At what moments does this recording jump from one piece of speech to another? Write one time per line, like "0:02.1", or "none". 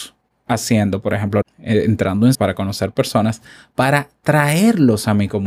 0:01.4
0:02.3